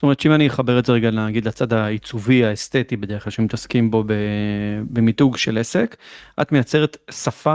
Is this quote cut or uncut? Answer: cut